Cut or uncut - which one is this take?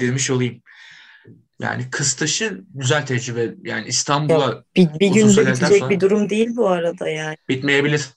uncut